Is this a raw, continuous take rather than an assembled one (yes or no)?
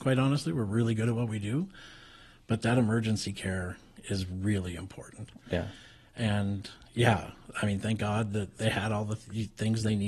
yes